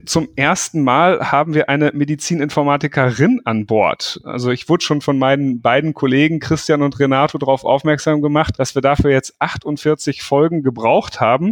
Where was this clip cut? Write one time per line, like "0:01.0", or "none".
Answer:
none